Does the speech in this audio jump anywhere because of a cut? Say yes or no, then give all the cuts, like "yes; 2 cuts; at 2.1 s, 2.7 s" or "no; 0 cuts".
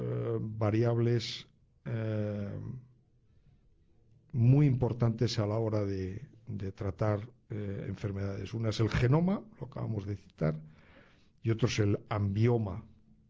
no; 0 cuts